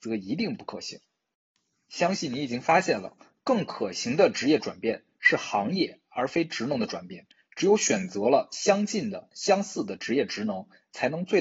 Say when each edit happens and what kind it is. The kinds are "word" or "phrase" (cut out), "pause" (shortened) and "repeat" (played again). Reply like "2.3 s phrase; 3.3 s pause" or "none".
none